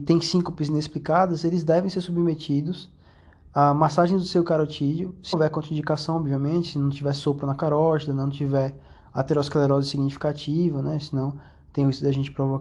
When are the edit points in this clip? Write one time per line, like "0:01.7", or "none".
0:05.3